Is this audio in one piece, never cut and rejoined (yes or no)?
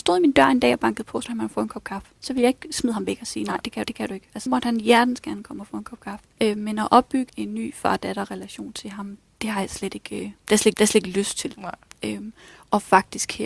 no